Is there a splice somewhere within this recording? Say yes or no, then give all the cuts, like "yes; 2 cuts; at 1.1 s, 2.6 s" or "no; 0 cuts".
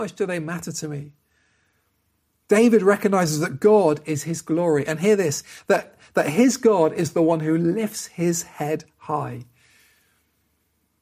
no; 0 cuts